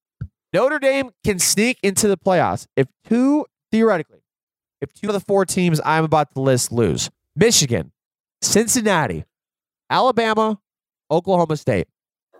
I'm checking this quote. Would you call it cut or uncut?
cut